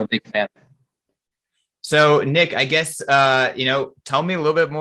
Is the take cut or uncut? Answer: uncut